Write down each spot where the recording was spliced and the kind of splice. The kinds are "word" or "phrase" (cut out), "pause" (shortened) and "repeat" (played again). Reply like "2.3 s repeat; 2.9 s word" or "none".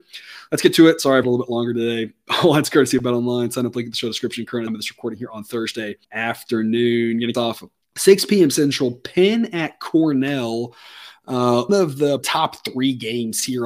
1.2 s word; 4.7 s phrase; 6.0 s pause; 7.3 s word; 7.8 s pause; 11.7 s word; 12.2 s word